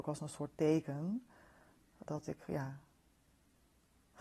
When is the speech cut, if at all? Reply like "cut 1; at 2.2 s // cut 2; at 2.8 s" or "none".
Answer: cut 1; at 2.1 s